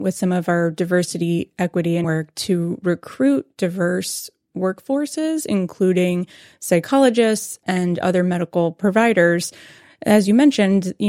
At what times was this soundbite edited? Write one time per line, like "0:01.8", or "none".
0:02.0